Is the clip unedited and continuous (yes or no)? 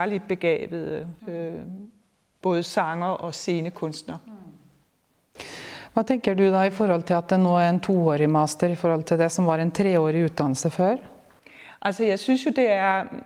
no